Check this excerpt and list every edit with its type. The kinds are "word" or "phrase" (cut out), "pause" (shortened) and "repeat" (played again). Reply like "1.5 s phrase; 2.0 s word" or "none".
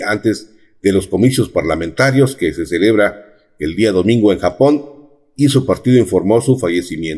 none